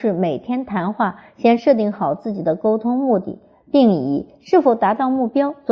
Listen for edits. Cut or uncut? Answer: uncut